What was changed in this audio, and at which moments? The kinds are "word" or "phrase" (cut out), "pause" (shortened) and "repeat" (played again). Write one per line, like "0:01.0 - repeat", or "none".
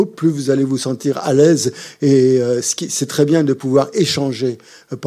none